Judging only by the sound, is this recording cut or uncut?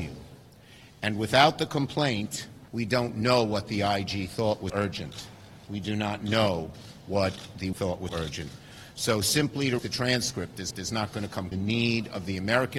cut